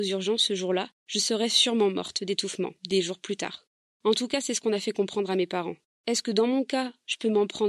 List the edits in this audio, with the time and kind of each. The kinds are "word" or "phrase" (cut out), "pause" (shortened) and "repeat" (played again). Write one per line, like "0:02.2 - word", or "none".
0:01.0 - pause
0:02.8 - pause
0:03.7 - pause
0:05.9 - pause